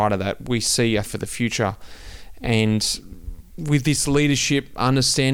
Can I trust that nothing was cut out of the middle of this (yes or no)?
no